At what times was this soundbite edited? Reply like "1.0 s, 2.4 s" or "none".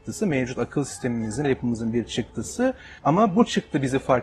1.4 s, 3.0 s